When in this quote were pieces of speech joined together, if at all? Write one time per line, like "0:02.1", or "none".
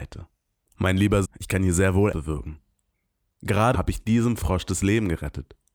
0:01.2
0:02.1
0:03.7